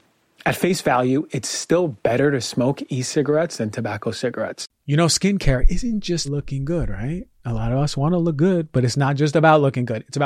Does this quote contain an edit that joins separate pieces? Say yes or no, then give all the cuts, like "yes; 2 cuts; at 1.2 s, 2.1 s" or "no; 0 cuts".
yes; 1 cut; at 6.2 s